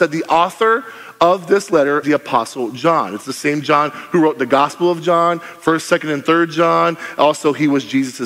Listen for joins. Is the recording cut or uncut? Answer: cut